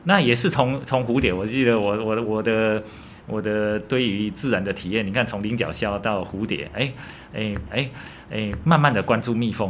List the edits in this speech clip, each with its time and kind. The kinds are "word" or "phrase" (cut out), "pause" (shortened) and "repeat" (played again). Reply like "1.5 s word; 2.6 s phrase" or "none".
7.7 s repeat